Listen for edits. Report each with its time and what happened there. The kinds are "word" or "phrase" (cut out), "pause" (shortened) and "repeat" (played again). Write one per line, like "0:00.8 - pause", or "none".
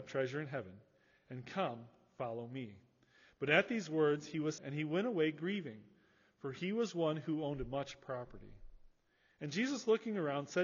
0:04.6 - word